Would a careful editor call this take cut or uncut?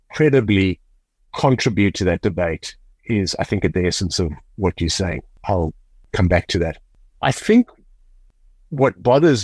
uncut